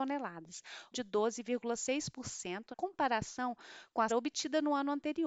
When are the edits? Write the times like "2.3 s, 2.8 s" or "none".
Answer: 0.9 s, 2.7 s, 4.1 s